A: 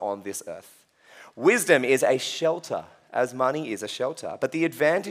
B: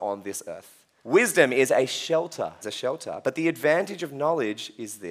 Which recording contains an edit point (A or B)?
B